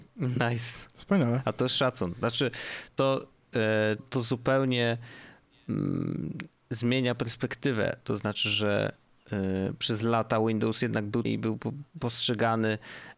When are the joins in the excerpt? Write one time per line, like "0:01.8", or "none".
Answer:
0:04.0
0:11.2